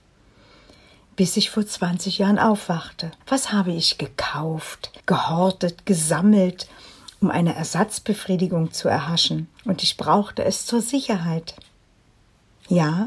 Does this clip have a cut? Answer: yes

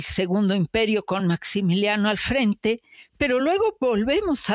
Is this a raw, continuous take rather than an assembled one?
yes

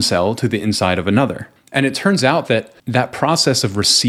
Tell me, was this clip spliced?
yes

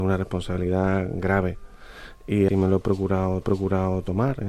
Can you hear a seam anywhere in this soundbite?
yes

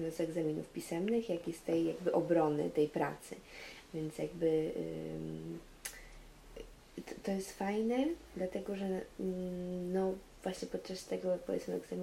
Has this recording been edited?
no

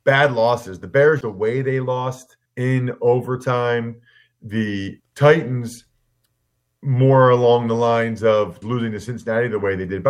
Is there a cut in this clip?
yes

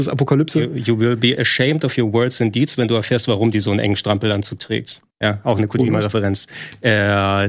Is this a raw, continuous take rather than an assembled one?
no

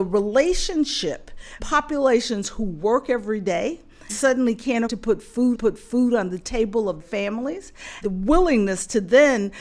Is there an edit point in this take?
yes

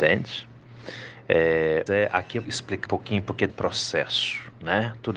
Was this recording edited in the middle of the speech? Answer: yes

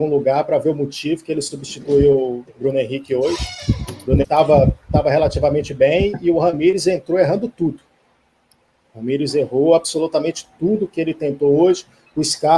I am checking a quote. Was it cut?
yes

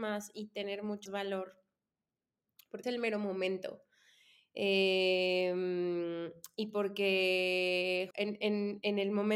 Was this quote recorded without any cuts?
no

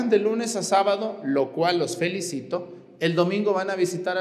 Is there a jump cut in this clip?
no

